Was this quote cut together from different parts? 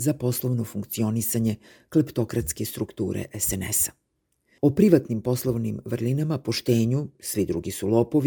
no; 0 cuts

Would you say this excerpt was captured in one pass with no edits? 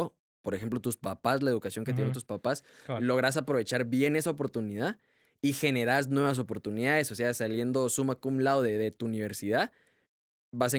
yes; 0 cuts

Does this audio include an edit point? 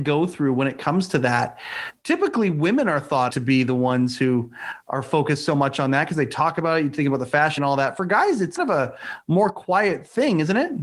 yes; 3 cuts; at 3.3 s, 7.6 s, 8.6 s

